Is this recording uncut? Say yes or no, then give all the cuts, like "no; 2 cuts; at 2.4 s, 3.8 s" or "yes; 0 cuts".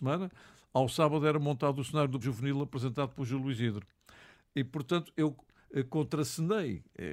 no; 1 cut; at 2.2 s